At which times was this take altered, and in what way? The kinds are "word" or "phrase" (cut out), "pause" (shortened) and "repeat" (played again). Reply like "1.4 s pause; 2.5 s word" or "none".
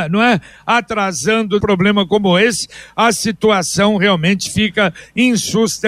1.6 s phrase